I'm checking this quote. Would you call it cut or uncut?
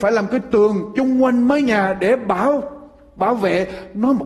uncut